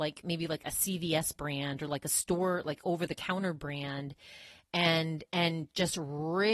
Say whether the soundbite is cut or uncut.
uncut